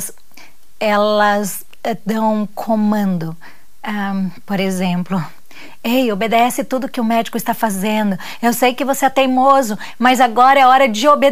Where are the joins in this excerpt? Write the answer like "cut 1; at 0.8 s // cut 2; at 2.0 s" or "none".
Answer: none